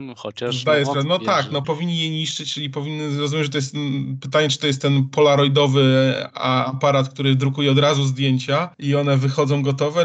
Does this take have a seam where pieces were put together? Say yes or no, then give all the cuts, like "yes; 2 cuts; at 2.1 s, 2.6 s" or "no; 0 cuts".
yes; 2 cuts; at 1.6 s, 8.7 s